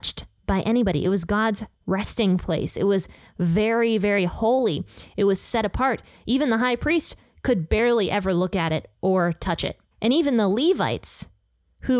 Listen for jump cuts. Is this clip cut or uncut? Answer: uncut